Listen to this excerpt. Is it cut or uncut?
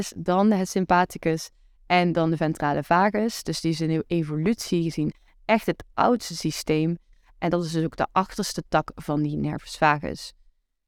uncut